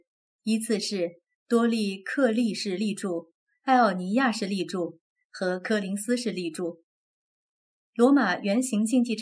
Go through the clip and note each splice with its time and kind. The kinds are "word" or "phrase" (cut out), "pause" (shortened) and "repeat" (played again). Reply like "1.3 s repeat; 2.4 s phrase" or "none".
none